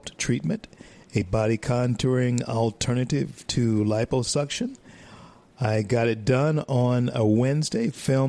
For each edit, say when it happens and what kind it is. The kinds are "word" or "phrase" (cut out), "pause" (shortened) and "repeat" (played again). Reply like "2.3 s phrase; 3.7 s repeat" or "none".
none